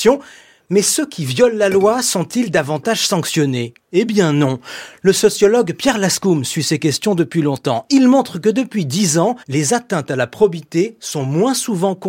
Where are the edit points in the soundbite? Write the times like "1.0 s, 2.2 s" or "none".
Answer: 9.4 s

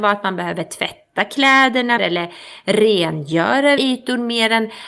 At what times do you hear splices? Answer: 2.0 s, 3.8 s

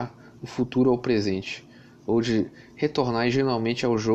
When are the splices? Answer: none

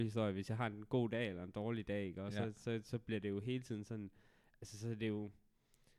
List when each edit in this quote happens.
none

